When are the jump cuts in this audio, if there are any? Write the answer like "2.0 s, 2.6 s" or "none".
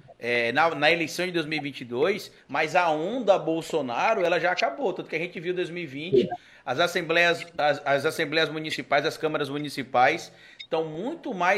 none